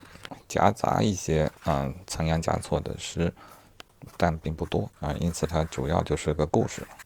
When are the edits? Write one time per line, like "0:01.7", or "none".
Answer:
0:01.6